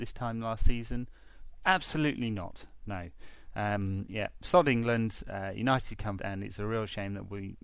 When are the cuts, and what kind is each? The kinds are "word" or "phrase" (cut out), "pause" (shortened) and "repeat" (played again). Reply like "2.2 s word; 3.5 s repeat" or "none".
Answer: 4.1 s word; 6.2 s word

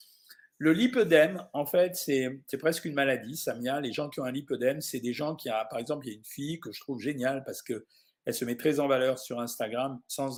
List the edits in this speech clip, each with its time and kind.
none

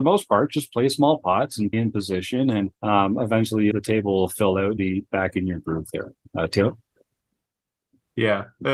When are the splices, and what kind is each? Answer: 1.7 s word; 2.7 s pause; 3.7 s word; 4.8 s word

